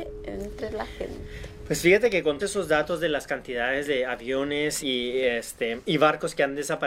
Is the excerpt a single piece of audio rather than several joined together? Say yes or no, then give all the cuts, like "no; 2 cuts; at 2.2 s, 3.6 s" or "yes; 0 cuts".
no; 2 cuts; at 2.4 s, 4.8 s